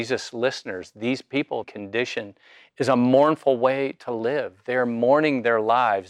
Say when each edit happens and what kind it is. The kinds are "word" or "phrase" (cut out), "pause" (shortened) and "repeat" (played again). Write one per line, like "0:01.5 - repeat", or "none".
0:01.6 - phrase